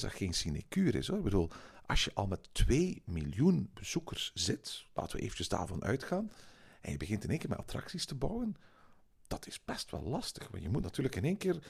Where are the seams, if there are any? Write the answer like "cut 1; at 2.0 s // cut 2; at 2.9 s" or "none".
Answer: none

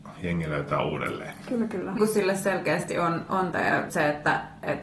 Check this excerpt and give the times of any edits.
cut 1; at 2.0 s // cut 2; at 3.5 s // cut 3; at 3.9 s

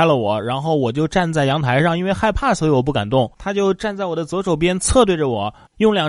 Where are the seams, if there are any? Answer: cut 1; at 3.3 s

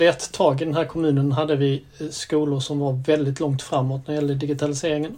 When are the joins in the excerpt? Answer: none

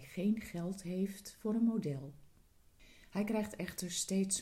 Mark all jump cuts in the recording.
none

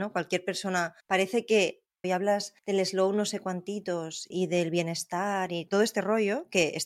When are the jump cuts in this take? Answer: cut 1; at 1.0 s // cut 2; at 2.0 s // cut 3; at 2.6 s // cut 4; at 4.3 s // cut 5; at 5.7 s

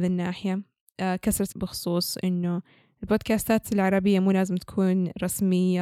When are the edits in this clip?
cut 1; at 1.5 s

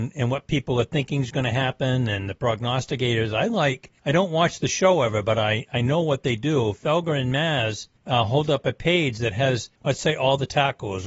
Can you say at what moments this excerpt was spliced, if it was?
cut 1; at 4.0 s // cut 2; at 8.0 s // cut 3; at 9.8 s

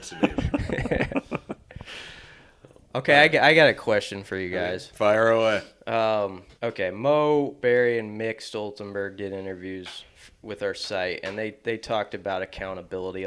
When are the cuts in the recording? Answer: cut 1; at 6.6 s

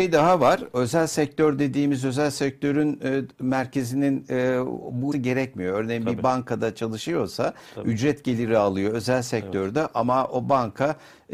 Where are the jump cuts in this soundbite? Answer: cut 1; at 5.1 s

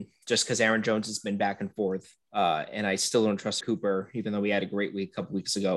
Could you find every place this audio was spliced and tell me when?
cut 1; at 2.2 s // cut 2; at 3.6 s

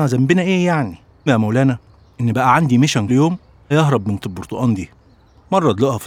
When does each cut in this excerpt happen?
cut 1; at 1.3 s // cut 2; at 3.1 s // cut 3; at 3.7 s // cut 4; at 4.2 s

